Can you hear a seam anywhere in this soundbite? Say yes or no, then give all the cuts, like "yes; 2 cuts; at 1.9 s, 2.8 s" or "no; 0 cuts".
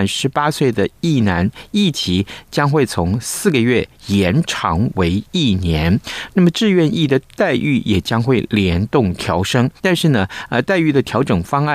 yes; 1 cut; at 9.8 s